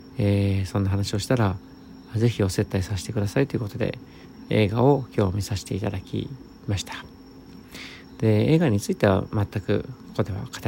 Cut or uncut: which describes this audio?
uncut